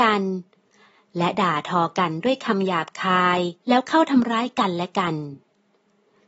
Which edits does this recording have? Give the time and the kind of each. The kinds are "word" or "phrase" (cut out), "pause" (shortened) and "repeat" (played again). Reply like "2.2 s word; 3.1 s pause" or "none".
3.6 s pause